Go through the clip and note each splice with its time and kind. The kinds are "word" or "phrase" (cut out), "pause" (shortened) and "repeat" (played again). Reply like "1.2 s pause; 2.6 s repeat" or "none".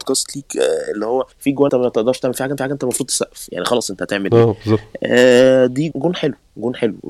1.3 s pause; 1.7 s word; 2.6 s repeat; 5.9 s word